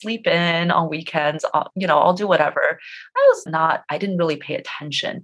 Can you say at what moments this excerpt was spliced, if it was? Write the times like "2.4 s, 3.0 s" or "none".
3.5 s